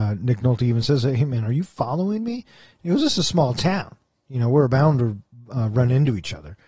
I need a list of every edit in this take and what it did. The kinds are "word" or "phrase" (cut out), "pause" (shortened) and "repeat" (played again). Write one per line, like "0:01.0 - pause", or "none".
none